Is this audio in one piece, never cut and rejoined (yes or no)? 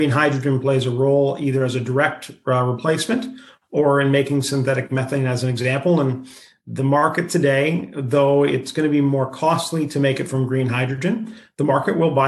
yes